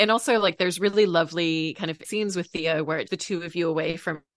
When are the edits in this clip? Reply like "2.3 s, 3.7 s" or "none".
2.0 s, 3.1 s